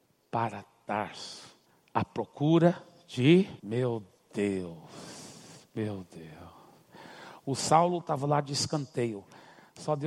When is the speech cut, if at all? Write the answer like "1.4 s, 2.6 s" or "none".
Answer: 1.7 s, 3.6 s